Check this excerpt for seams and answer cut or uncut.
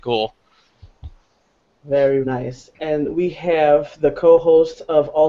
cut